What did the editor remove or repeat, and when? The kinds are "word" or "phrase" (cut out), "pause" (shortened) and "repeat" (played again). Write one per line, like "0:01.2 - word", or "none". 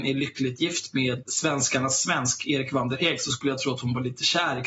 0:01.2 - word